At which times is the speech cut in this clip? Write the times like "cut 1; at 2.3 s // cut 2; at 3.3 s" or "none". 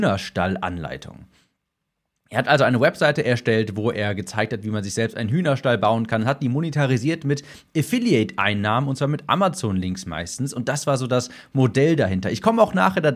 none